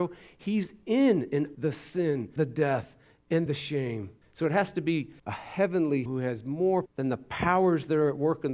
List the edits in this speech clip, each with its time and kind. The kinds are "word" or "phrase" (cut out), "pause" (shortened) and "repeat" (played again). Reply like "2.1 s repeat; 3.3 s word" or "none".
1.5 s word; 2.4 s word; 3.5 s phrase; 4.2 s pause; 5.2 s pause; 6.1 s word; 6.9 s word